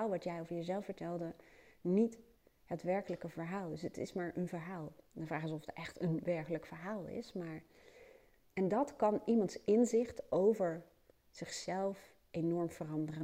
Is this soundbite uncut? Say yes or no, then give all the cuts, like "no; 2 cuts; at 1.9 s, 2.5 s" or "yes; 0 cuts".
yes; 0 cuts